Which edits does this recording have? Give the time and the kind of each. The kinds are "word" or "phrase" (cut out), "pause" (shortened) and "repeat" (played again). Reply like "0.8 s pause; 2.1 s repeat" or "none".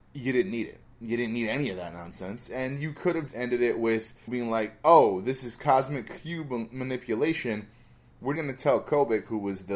3.3 s word; 4.3 s word; 8.4 s word